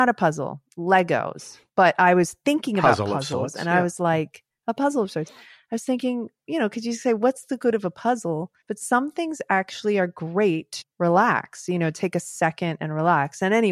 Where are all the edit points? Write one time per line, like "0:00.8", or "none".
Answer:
0:01.7
0:08.6
0:10.8